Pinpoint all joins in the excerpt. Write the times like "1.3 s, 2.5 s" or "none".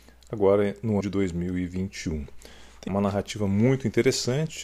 1.0 s, 2.9 s